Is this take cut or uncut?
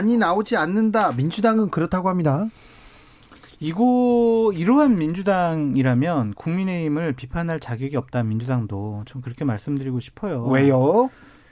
uncut